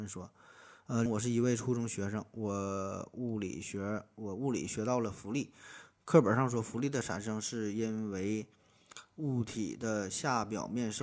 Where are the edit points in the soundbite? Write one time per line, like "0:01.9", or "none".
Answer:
0:01.1